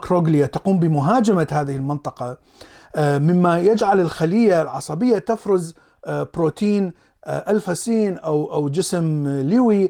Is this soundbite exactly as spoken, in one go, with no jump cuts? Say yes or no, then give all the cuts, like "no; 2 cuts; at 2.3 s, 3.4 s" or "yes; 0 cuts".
yes; 0 cuts